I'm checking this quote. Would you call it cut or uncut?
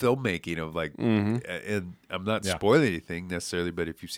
uncut